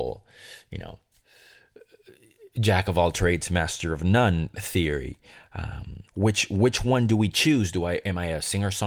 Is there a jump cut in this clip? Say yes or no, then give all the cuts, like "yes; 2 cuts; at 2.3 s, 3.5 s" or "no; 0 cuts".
yes; 1 cut; at 6.1 s